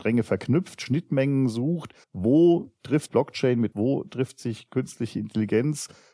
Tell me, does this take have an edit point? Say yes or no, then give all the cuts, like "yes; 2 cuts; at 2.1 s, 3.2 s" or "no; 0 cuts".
yes; 3 cuts; at 2.0 s, 3.1 s, 3.7 s